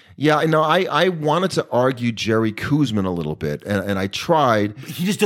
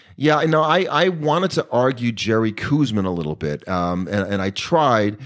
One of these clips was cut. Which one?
first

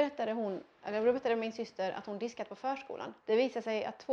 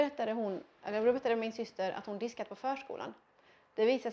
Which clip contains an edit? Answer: first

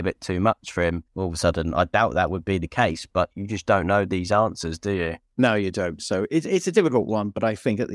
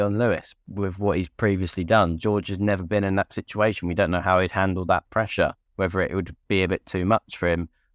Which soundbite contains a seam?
first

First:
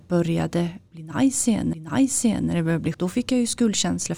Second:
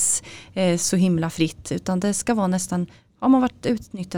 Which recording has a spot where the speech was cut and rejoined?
first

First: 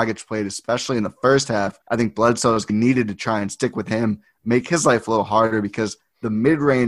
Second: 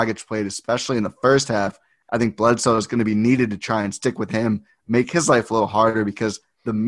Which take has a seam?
first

